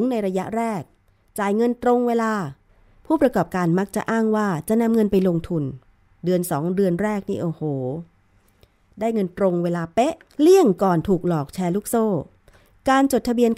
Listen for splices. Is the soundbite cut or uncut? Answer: cut